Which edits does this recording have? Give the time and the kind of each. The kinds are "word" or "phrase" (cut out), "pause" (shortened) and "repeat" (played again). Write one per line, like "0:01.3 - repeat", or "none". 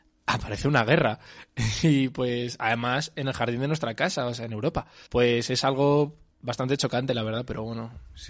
0:05.1 - pause